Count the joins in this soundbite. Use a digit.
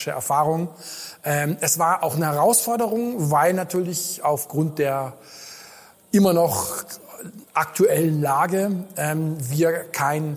0